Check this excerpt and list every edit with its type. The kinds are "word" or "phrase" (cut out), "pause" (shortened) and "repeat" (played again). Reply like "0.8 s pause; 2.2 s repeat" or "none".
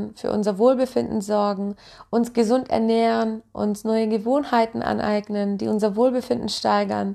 none